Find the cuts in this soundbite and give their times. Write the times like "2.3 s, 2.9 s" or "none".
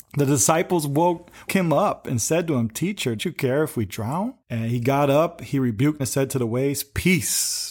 1.5 s, 3.2 s, 4.4 s, 6.0 s

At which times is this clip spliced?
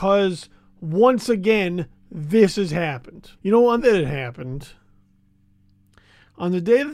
3.4 s, 3.8 s

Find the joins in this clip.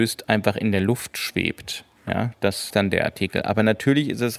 2.7 s

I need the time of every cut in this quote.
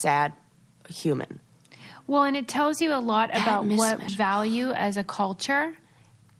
4.1 s

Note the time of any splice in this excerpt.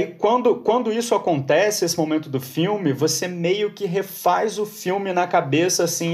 none

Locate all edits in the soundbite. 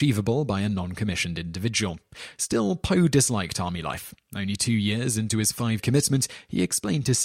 5.8 s

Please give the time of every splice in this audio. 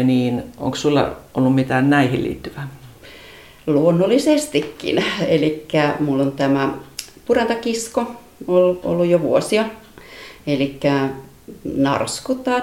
none

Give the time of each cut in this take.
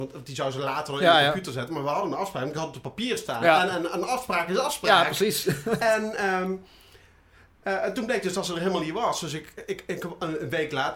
none

